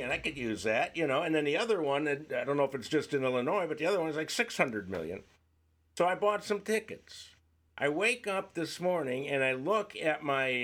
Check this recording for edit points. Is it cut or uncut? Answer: uncut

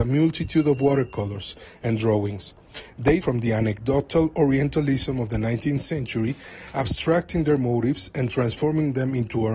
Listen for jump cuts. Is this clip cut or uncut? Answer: cut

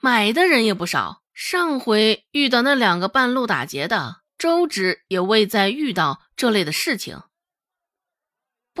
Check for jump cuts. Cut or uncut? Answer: cut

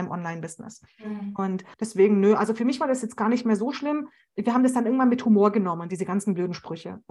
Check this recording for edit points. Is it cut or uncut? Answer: cut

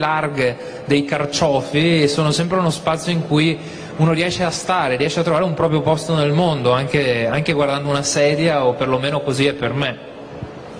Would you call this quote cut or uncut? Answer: uncut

